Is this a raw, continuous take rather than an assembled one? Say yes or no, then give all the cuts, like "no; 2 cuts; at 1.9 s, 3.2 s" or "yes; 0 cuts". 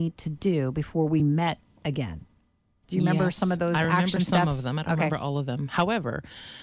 yes; 0 cuts